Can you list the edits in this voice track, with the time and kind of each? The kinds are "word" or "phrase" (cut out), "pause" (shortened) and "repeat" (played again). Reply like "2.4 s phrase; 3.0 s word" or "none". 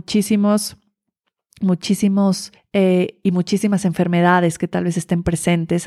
2.5 s pause